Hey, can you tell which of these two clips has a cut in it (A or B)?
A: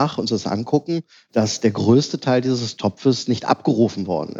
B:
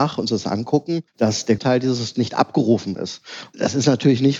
B